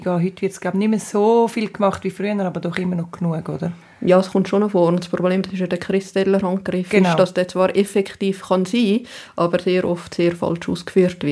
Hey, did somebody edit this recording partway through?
no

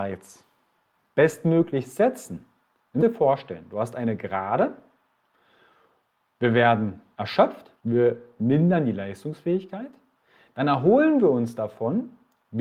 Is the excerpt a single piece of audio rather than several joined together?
no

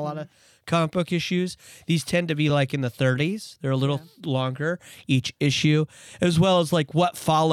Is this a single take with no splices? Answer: yes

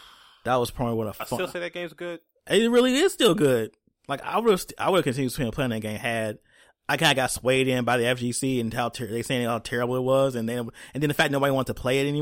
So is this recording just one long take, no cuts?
yes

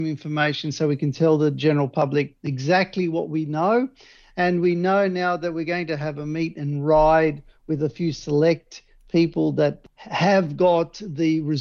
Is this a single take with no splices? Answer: yes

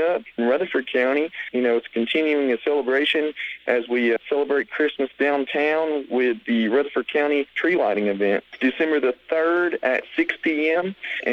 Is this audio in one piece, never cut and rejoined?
yes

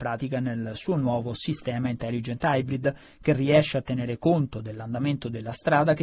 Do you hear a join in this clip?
no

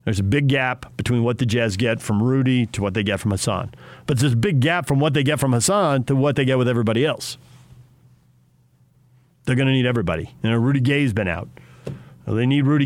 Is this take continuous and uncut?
yes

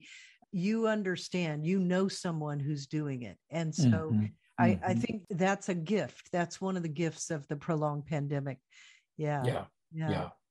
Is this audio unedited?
yes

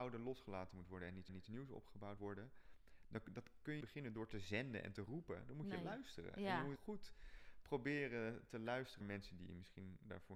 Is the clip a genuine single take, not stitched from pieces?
no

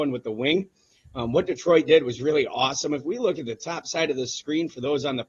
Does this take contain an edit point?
no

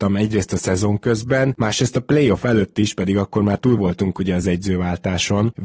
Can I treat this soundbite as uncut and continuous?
yes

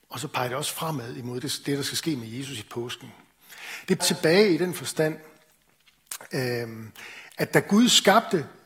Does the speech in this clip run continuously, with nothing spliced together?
no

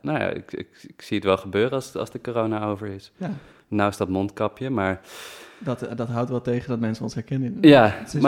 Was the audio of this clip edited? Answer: no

